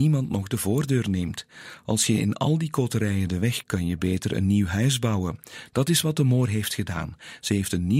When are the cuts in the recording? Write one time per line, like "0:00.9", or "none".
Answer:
0:03.6